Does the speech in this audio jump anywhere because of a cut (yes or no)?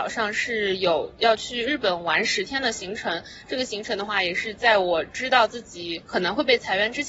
no